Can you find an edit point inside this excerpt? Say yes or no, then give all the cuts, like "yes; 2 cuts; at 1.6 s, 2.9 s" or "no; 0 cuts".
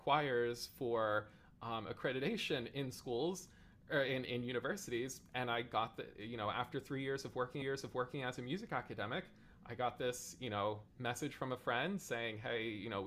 yes; 2 cuts; at 7.6 s, 10.9 s